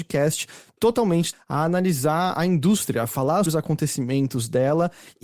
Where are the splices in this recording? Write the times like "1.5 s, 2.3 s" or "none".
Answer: 1.3 s, 3.5 s